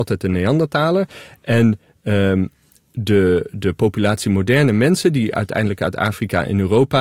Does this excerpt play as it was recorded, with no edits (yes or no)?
yes